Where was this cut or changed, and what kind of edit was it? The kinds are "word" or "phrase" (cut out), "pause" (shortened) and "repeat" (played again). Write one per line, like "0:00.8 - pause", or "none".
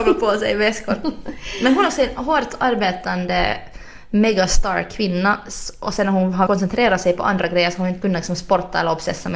0:06.5 - word

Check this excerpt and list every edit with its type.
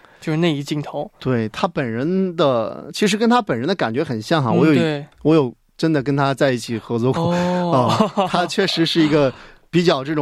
none

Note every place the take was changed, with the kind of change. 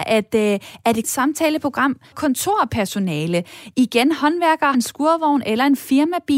0:01.0 - word
0:02.1 - word
0:04.7 - word

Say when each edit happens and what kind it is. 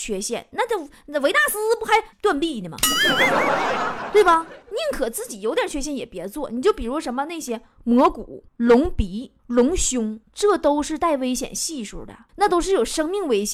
0:02.1 - pause
0:04.6 - pause
0:08.5 - pause
0:09.4 - pause
0:10.2 - pause
0:12.3 - pause

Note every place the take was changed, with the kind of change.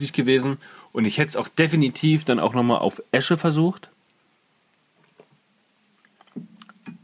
none

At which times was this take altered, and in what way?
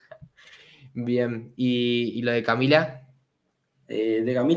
none

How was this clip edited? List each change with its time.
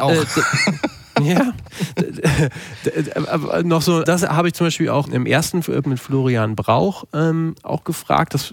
0:04.1 - word
0:05.1 - word
0:05.8 - word

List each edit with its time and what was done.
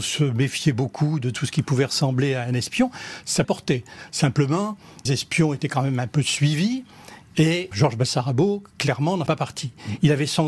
0:03.4 - word
0:05.1 - word
0:07.7 - word
0:09.3 - word

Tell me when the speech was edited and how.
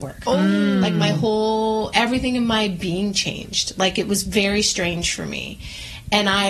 none

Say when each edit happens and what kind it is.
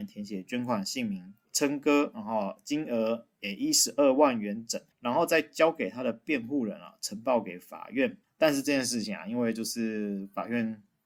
0:01.4 - pause
0:04.9 - pause
0:08.2 - pause

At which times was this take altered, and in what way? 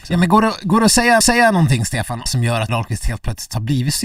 0:01.2 - repeat
0:02.3 - phrase
0:02.7 - word

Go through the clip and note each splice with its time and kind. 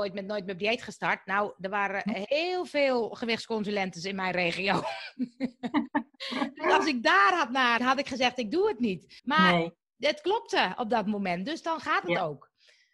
0:07.8 - phrase
0:09.2 - pause

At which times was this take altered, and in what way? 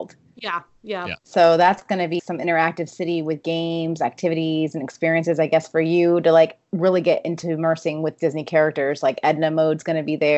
0:01.2 - pause
0:02.2 - word

